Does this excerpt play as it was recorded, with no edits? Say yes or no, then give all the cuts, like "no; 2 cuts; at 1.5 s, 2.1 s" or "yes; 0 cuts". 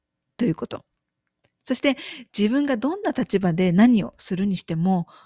yes; 0 cuts